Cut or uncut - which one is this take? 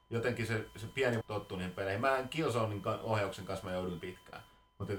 cut